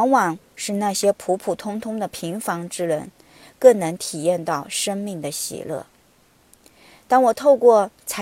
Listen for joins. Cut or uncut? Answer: uncut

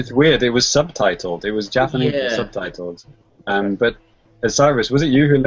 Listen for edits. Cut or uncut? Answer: uncut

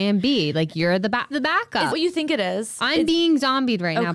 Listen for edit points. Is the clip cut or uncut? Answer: cut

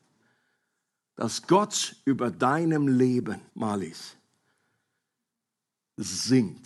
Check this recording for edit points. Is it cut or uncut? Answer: cut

